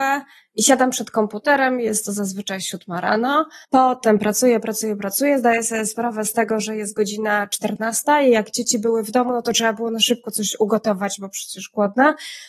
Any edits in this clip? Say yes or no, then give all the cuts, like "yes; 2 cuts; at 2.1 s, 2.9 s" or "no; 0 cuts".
yes; 1 cut; at 3.6 s